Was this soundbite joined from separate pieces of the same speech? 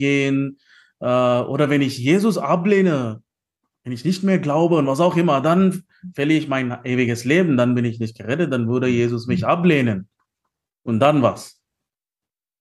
no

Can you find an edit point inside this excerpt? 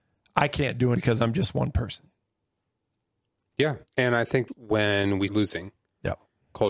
yes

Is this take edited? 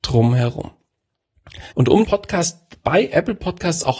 yes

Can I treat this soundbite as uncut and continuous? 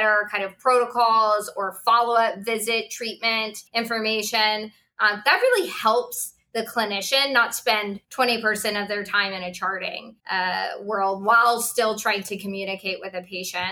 no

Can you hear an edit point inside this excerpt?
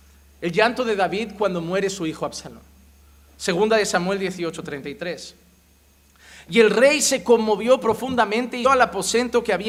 yes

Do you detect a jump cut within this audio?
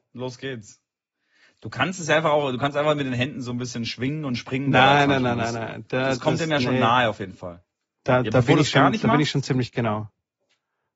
no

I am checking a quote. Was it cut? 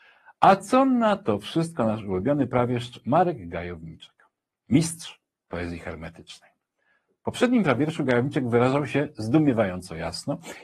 no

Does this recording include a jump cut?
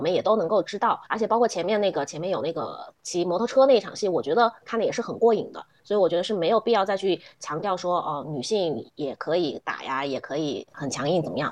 yes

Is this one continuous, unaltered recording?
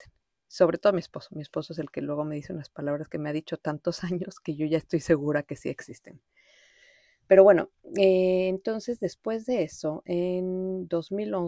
yes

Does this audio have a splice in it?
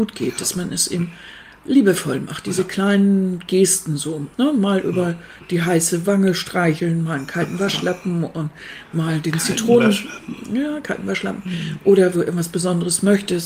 yes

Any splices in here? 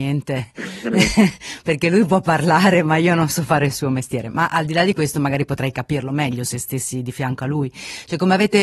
no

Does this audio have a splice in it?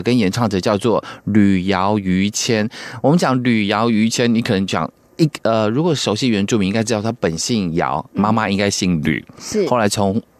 no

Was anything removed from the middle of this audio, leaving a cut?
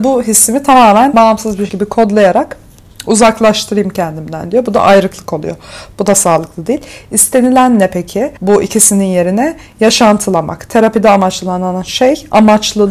yes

